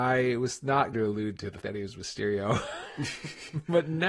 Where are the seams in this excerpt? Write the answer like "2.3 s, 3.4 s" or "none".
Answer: 0.9 s, 1.6 s